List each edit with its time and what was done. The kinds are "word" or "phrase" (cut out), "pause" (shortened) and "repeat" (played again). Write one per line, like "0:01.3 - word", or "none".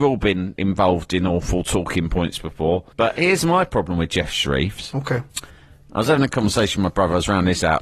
0:02.9 - pause
0:05.3 - pause